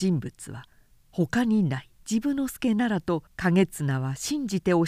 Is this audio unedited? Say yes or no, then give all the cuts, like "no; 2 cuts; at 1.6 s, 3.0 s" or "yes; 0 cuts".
no; 2 cuts; at 2.0 s, 3.3 s